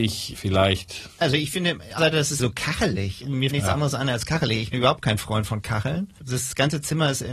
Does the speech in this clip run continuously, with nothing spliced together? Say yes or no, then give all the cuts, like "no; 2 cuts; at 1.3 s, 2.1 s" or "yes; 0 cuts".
no; 5 cuts; at 1.2 s, 2.0 s, 2.4 s, 3.5 s, 4.7 s